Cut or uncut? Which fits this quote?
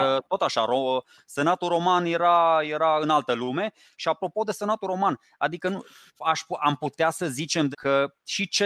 cut